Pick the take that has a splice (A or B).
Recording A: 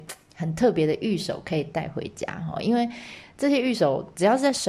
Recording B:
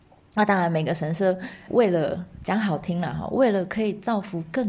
B